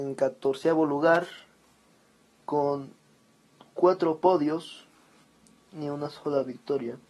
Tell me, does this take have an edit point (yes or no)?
yes